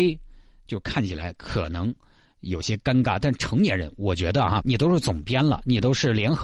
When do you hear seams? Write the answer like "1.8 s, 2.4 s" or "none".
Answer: 4.6 s